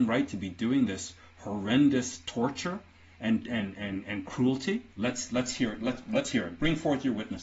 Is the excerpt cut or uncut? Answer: cut